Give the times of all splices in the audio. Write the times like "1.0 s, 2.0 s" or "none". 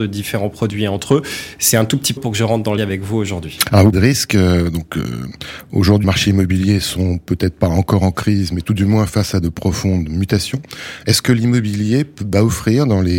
2.2 s, 2.8 s, 3.9 s, 6.0 s